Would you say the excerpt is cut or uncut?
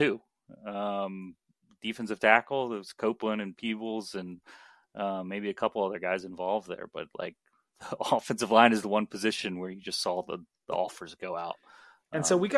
uncut